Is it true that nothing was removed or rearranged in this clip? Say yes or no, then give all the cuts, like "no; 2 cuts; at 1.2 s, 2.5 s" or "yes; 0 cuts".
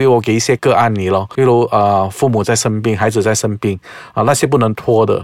no; 1 cut; at 1.3 s